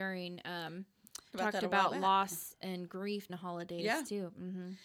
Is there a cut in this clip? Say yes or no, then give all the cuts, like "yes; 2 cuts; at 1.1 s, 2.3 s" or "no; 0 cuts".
yes; 2 cuts; at 1.3 s, 3.3 s